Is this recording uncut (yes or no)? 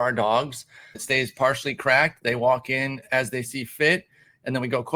no